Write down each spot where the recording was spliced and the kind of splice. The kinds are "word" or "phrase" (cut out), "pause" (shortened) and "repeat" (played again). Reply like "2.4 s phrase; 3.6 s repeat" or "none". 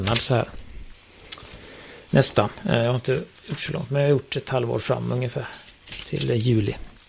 3.4 s pause